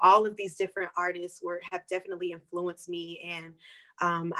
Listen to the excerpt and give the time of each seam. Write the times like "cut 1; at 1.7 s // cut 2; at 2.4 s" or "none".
none